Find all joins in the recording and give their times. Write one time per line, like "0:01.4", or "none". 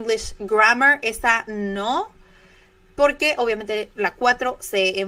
none

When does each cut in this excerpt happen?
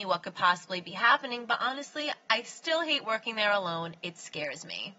none

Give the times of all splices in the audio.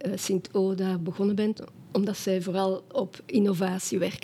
none

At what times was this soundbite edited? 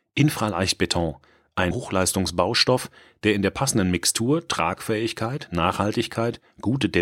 0:01.7

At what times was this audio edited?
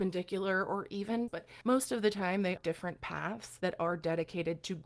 0:01.3
0:02.6

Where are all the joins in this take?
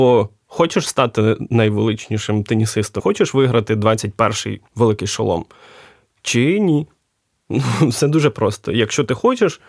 0:03.0
0:04.7

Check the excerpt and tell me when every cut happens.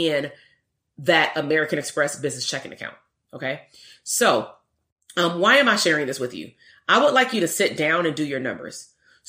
none

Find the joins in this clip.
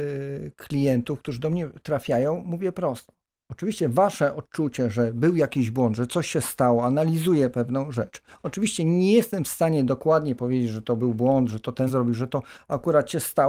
0:11.9

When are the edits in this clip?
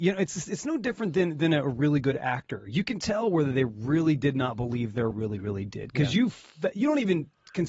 0:05.1

